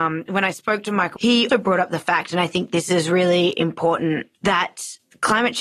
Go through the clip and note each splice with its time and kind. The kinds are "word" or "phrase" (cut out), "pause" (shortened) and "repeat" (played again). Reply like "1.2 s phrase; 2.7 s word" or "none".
1.2 s word; 1.5 s word